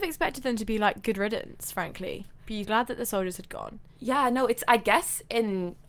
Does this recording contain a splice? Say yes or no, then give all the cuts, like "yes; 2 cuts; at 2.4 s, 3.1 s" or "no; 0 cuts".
yes; 1 cut; at 2.6 s